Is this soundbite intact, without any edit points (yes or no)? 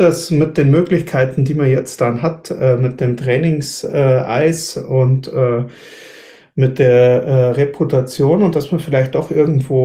yes